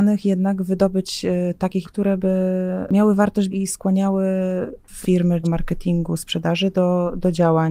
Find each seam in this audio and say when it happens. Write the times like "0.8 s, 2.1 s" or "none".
1.8 s, 3.5 s, 5.0 s, 5.4 s